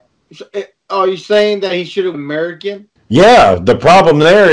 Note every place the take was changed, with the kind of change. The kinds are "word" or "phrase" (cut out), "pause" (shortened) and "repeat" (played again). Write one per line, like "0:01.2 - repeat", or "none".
0:02.1 - word
0:03.0 - pause